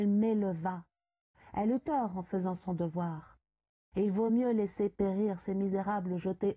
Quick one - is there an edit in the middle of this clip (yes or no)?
no